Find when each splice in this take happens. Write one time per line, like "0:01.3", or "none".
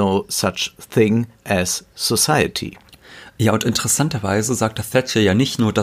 none